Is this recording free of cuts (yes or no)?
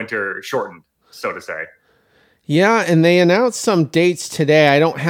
yes